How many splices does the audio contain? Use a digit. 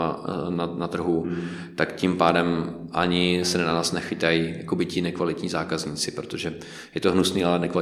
0